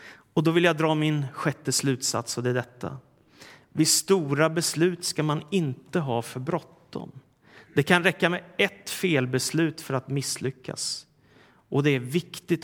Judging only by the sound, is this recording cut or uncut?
uncut